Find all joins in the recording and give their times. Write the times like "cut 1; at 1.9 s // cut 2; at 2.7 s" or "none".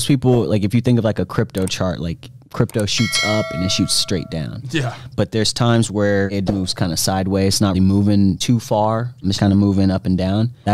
cut 1; at 6.5 s // cut 2; at 7.7 s // cut 3; at 9.3 s